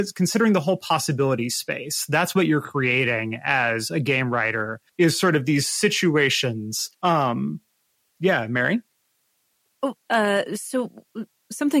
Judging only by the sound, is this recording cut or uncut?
cut